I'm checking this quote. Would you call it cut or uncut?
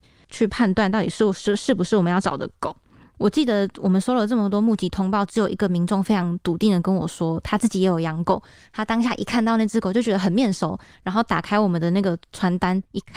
uncut